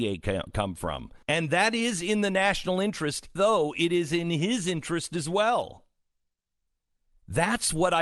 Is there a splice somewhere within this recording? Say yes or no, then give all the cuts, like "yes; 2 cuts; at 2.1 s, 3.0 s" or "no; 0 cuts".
yes; 2 cuts; at 1.2 s, 3.4 s